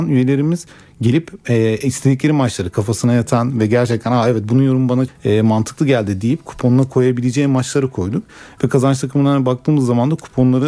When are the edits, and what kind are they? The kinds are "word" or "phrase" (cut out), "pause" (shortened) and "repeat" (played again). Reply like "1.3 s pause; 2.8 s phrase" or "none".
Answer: 5.1 s word